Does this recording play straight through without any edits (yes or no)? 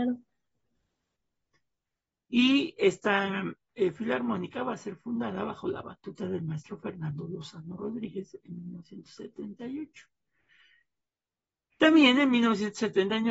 yes